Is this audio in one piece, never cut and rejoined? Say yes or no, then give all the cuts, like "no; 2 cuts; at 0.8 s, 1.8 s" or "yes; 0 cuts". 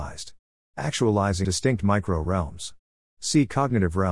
no; 1 cut; at 1.4 s